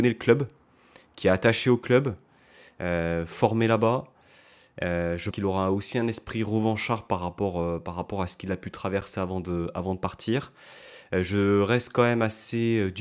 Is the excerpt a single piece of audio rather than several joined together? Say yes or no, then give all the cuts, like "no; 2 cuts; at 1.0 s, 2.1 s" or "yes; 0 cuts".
no; 1 cut; at 5.3 s